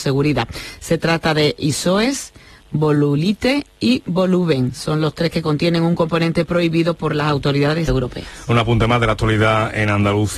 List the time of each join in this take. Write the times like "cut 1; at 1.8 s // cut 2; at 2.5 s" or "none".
cut 1; at 7.9 s